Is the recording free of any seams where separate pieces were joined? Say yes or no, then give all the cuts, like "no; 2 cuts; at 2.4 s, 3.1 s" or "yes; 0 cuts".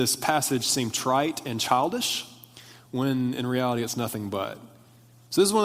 yes; 0 cuts